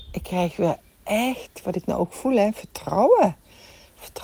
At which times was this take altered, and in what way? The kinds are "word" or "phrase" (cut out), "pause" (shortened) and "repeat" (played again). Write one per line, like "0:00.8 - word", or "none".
none